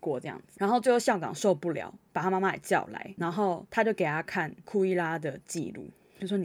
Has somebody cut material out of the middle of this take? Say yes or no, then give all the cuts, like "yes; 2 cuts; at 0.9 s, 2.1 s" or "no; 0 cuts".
yes; 1 cut; at 3.2 s